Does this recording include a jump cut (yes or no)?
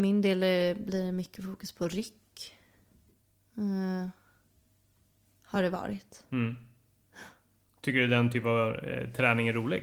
no